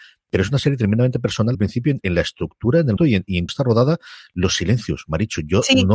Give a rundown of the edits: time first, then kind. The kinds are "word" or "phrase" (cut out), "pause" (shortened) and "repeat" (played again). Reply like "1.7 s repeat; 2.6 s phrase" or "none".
1.5 s word; 2.0 s word; 3.0 s word; 3.5 s word